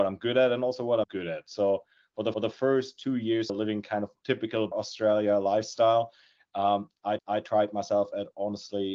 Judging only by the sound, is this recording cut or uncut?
cut